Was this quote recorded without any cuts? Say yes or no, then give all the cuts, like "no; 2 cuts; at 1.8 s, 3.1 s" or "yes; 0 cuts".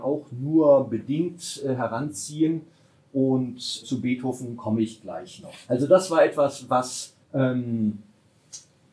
no; 2 cuts; at 3.8 s, 7.2 s